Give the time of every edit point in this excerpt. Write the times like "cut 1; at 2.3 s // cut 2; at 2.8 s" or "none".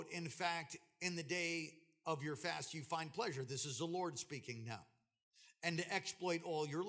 none